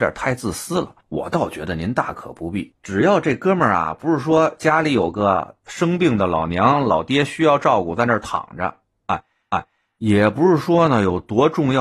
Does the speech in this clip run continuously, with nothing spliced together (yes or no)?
no